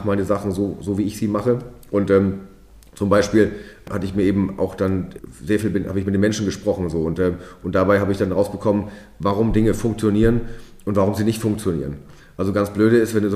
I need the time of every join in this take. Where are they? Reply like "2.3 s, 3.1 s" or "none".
none